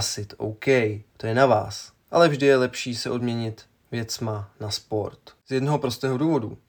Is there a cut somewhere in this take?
no; 0 cuts

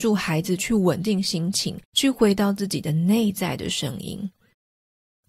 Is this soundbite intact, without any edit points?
no; 1 cut; at 1.9 s

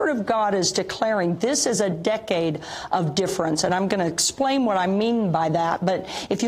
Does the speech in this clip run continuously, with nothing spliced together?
yes; 0 cuts

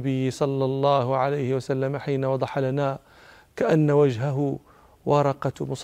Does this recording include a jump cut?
no; 0 cuts

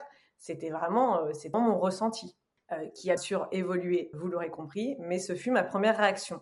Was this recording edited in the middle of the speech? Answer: yes; 3 cuts; at 1.5 s, 3.2 s, 4.1 s

